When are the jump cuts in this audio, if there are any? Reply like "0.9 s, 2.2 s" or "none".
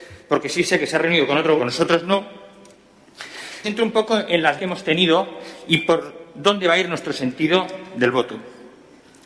1.6 s, 3.6 s, 4.6 s